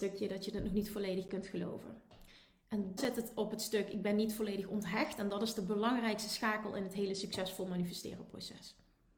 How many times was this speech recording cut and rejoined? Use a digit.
1